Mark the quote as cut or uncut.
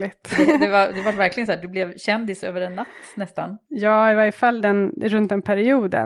uncut